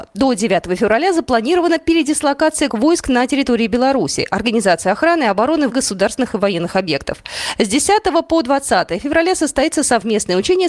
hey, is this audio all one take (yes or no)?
no